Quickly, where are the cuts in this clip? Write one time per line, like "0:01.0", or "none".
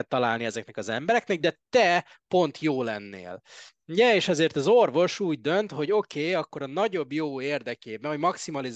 none